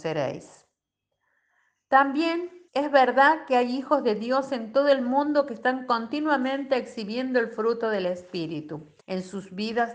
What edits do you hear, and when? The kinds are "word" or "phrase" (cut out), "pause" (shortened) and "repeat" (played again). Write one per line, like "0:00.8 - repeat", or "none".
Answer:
0:02.7 - pause
0:09.0 - pause